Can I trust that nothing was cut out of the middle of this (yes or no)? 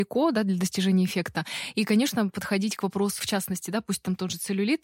no